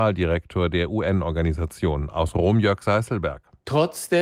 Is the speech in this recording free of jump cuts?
yes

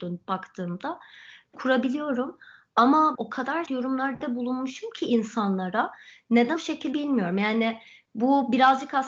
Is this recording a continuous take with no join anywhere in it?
no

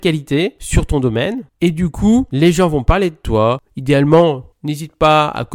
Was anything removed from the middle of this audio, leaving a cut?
yes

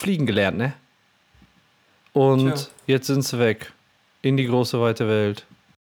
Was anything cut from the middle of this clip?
no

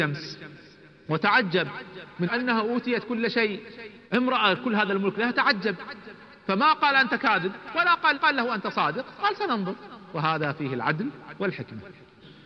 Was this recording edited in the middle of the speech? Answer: yes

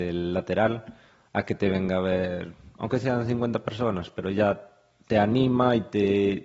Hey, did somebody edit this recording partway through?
no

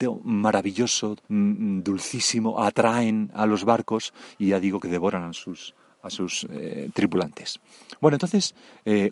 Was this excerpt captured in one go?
no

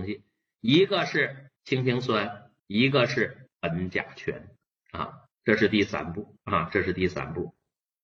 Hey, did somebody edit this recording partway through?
yes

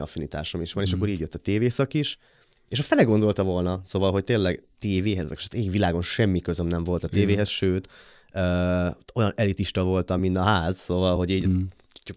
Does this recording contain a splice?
no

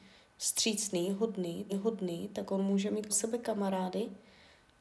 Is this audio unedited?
no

